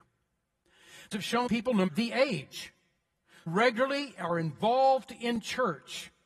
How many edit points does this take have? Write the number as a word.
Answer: four